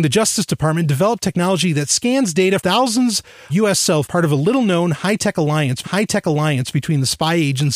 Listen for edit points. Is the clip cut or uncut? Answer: cut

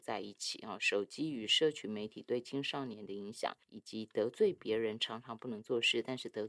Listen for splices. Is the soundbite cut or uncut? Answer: cut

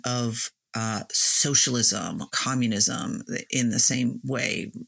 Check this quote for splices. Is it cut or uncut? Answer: cut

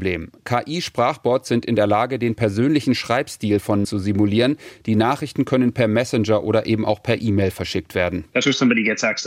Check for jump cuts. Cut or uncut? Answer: cut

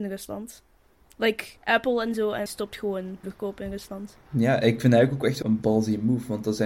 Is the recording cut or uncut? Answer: cut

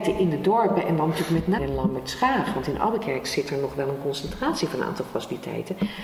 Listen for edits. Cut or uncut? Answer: cut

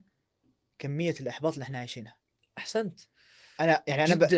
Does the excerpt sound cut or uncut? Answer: uncut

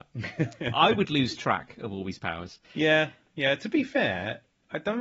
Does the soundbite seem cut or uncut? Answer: cut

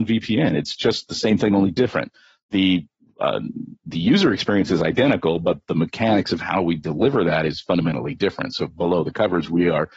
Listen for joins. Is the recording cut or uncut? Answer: uncut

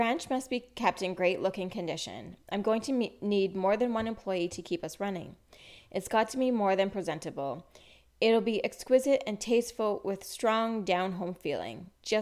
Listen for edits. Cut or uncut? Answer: uncut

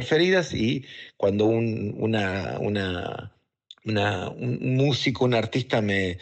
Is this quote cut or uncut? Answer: cut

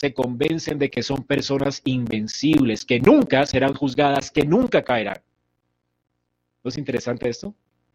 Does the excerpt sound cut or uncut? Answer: uncut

